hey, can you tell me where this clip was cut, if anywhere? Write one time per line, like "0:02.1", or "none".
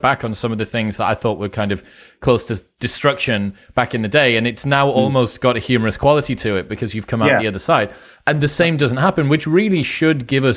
none